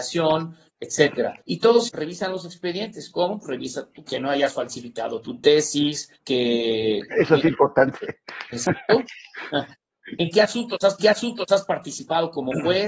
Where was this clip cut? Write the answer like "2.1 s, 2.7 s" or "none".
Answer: 1.4 s, 1.9 s, 4.1 s, 6.2 s, 11.0 s